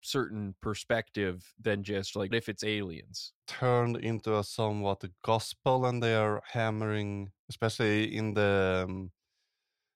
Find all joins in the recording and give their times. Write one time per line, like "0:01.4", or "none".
0:02.3
0:07.4

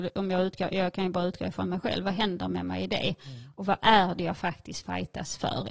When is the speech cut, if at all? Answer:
none

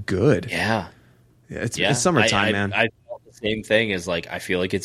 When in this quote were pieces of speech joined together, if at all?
none

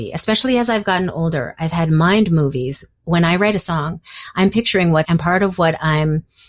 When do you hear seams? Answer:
0:05.0

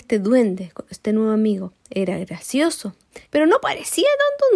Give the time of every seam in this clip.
0:03.3

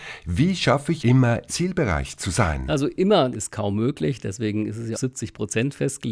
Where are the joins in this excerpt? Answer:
0:01.0
0:01.5
0:03.3
0:04.9

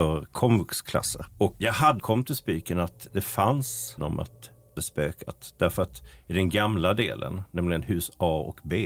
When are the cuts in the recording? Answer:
0:02.0
0:04.0
0:04.8

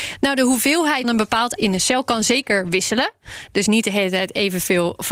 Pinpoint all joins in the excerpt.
0:01.0
0:01.6
0:03.7

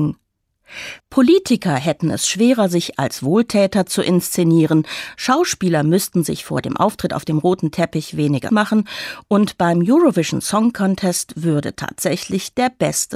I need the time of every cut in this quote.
0:01.0
0:08.5

